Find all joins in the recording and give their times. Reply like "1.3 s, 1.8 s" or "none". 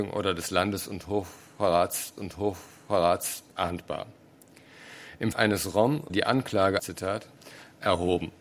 2.2 s, 5.3 s, 6.1 s, 6.8 s